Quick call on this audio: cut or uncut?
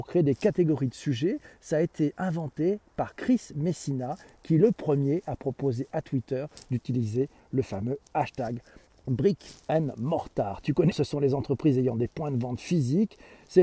cut